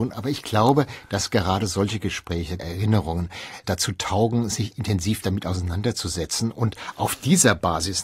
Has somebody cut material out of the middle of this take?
yes; 1 cut; at 2.6 s

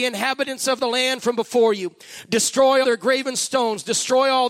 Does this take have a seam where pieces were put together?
yes; 1 cut; at 2.8 s

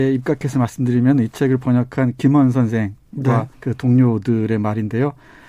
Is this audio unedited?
no; 1 cut; at 3.5 s

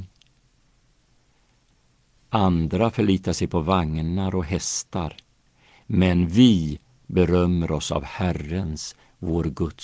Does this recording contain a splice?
no; 0 cuts

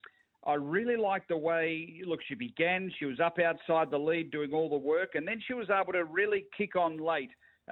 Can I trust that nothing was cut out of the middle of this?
yes; 0 cuts

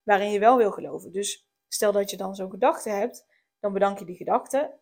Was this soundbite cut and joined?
no; 0 cuts

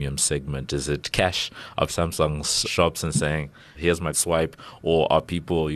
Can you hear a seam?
yes; 4 cuts; at 1.9 s, 2.6 s, 3.7 s, 4.1 s

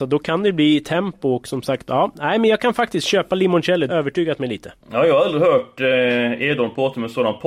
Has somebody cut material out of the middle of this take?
yes; 2 cuts; at 3.9 s, 4.8 s

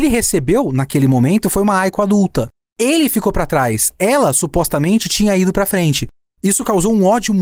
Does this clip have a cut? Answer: no; 0 cuts

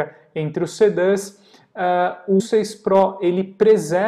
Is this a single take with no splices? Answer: no; 1 cut; at 2.4 s

